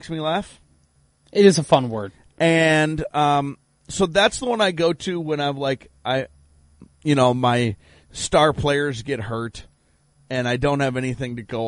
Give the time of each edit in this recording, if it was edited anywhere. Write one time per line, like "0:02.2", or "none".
none